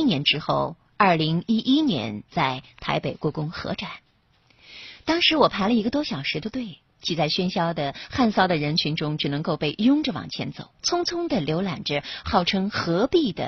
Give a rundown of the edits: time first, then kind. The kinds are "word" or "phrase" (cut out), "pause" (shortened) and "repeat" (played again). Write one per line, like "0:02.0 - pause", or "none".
0:10.7 - pause